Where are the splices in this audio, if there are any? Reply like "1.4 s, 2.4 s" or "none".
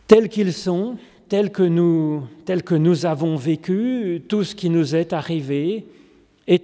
none

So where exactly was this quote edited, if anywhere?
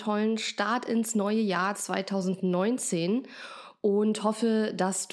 none

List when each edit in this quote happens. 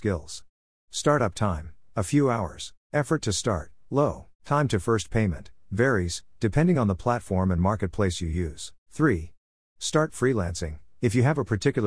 2.8 s, 4.3 s, 8.8 s

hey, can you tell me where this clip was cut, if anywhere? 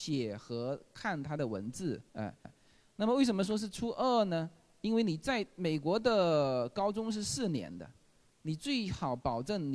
2.1 s, 2.4 s

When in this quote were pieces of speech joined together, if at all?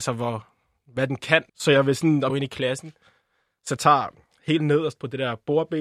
1.5 s, 2.3 s, 3.8 s

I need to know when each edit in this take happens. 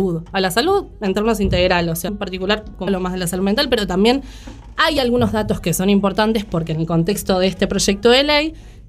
2.1 s, 2.9 s

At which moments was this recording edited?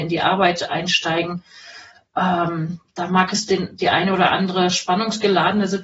none

